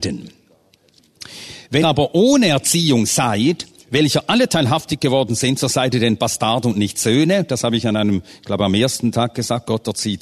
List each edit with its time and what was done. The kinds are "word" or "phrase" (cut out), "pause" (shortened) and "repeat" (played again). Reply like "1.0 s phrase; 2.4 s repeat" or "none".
1.8 s word